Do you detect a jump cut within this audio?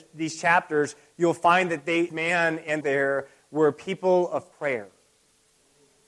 yes; 3 cuts; at 2.1 s, 2.8 s, 4.5 s

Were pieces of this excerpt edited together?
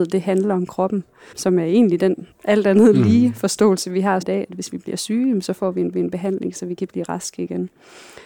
yes; 4 cuts; at 1.3 s, 2.3 s, 4.2 s, 5.9 s

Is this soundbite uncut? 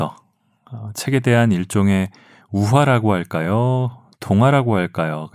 yes; 0 cuts

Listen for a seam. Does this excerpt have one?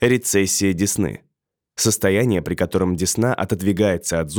no; 0 cuts

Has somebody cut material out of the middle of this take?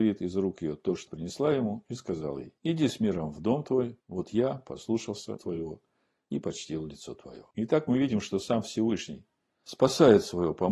yes; 5 cuts; at 1.1 s, 2.6 s, 4.0 s, 5.4 s, 7.5 s

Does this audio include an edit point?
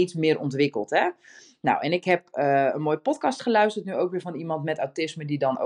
no; 0 cuts

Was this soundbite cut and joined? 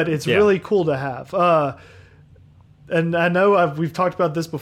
no; 0 cuts

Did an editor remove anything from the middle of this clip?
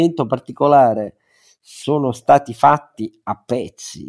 no; 0 cuts

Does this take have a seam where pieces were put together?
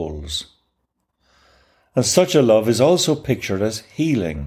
no; 0 cuts

